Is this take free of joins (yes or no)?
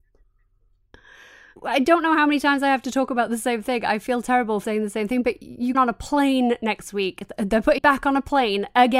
no